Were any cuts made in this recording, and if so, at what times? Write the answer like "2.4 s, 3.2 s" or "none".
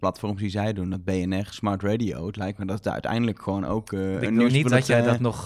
none